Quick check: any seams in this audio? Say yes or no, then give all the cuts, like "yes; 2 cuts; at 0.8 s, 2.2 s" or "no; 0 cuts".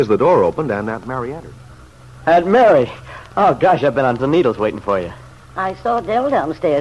yes; 1 cut; at 4.2 s